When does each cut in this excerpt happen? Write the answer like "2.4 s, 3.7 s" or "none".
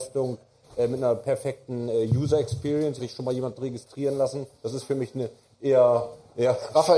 3.0 s, 3.6 s, 4.6 s